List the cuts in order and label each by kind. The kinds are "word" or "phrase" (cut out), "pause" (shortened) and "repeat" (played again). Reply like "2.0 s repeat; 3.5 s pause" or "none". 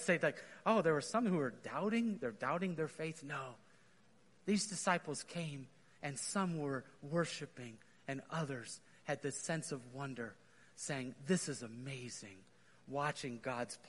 none